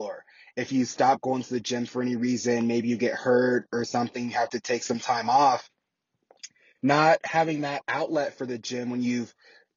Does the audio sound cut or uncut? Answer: uncut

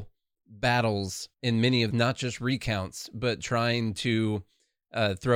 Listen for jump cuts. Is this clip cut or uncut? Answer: cut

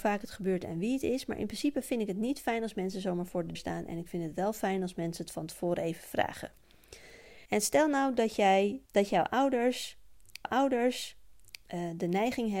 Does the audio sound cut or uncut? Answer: cut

